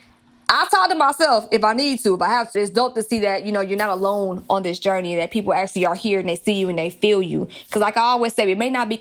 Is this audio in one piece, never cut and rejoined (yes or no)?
no